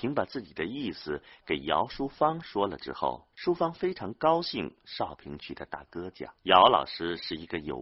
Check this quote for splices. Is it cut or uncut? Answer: cut